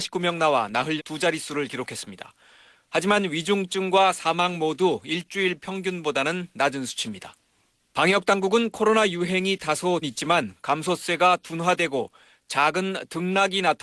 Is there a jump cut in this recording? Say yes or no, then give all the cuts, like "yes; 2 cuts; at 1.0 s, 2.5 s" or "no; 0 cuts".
yes; 2 cuts; at 1.0 s, 10.0 s